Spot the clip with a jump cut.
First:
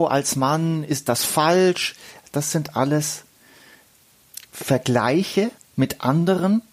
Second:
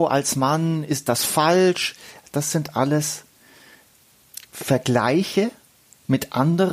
first; 1 cut; at 5.6 s

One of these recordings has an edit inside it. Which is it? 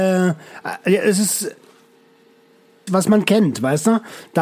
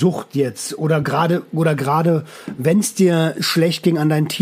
first; 1 cut; at 2.9 s

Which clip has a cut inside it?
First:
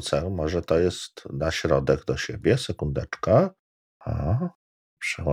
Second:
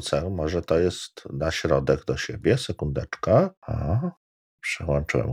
second; 1 cut; at 3.6 s

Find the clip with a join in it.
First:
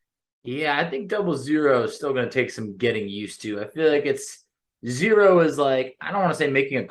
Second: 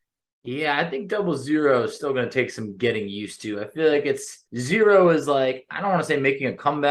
second; 1 cut; at 4.5 s

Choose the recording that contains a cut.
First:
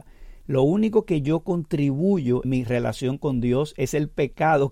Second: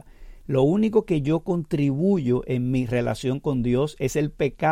first; 1 cut; at 2.4 s

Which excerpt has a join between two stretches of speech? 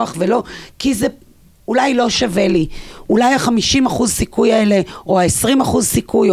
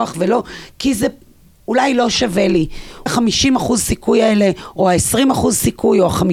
second; 1 cut; at 3.1 s

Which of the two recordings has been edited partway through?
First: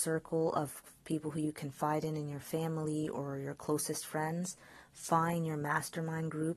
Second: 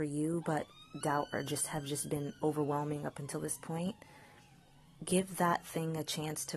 second; 1 cut; at 1.0 s

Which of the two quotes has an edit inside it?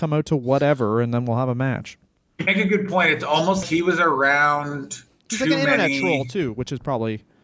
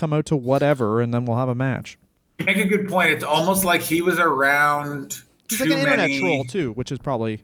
first; 1 cut; at 3.6 s

